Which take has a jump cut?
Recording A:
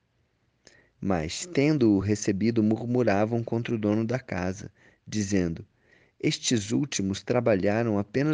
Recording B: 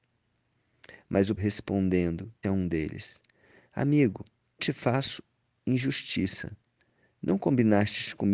B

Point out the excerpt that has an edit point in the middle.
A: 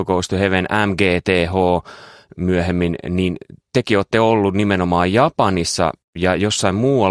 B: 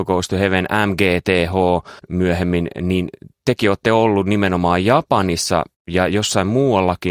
B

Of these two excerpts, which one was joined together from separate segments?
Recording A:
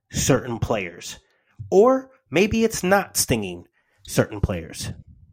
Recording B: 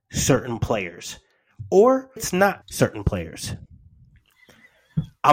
B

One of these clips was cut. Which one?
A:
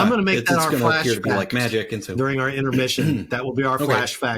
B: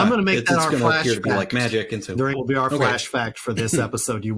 B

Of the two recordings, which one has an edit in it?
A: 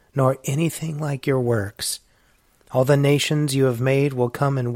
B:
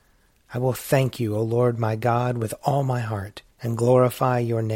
B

